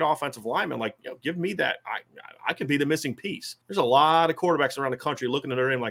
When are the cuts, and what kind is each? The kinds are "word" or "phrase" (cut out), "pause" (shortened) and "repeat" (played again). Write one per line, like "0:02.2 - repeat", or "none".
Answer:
0:03.6 - pause